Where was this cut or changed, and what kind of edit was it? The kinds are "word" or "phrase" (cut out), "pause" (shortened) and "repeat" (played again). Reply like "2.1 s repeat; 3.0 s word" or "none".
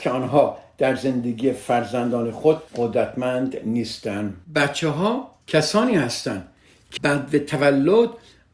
2.7 s pause; 4.4 s pause; 5.4 s pause; 7.0 s word